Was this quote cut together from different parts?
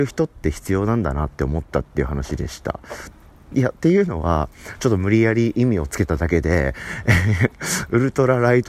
no; 0 cuts

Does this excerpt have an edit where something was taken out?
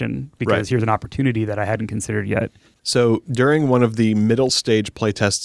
no; 0 cuts

